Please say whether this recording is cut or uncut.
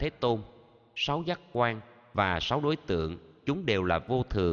uncut